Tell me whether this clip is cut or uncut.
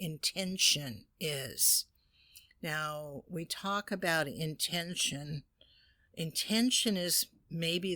uncut